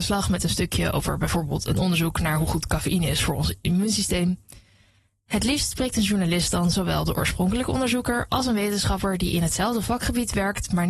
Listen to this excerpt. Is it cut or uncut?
uncut